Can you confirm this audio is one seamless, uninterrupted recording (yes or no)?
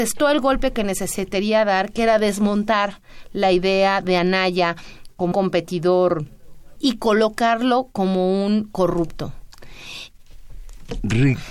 no